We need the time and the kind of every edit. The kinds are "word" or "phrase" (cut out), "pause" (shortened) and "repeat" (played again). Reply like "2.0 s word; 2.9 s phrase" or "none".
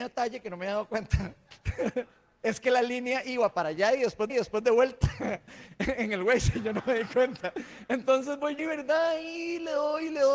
4.3 s repeat; 8.6 s word